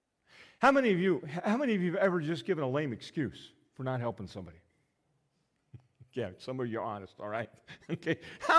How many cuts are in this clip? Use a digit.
0